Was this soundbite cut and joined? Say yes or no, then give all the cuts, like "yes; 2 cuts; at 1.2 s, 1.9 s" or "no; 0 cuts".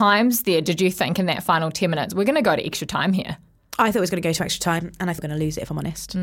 yes; 1 cut; at 5.2 s